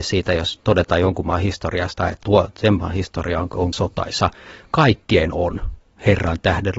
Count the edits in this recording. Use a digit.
2